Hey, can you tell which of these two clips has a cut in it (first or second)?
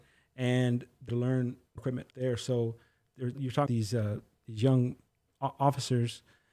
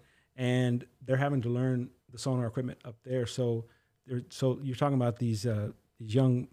first